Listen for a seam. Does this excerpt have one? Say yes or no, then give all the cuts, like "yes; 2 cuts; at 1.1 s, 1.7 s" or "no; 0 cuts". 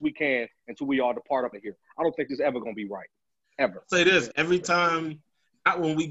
yes; 2 cuts; at 1.5 s, 4.3 s